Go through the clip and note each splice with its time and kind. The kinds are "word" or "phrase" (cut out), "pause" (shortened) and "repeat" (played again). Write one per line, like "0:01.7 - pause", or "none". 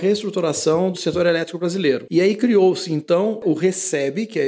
0:00.9 - word